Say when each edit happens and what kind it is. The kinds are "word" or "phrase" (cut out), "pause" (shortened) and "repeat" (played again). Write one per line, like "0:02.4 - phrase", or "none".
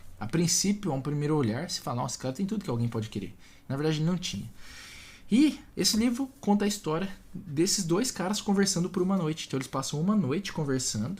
0:05.7 - pause